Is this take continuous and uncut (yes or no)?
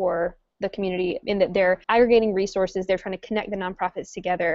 no